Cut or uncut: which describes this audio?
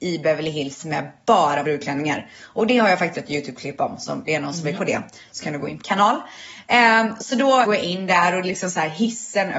cut